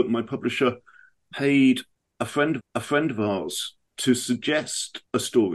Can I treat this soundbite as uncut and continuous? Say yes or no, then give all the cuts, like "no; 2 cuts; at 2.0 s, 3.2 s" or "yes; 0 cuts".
no; 1 cut; at 2.6 s